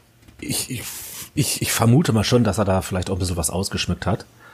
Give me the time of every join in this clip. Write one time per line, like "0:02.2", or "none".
none